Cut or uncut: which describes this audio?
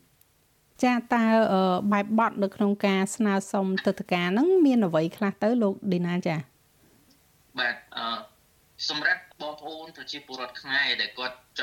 uncut